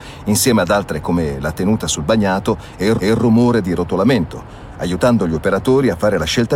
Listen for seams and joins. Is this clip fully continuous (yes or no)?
no